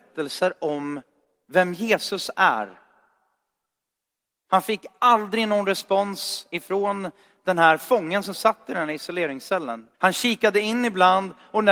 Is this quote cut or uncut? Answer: cut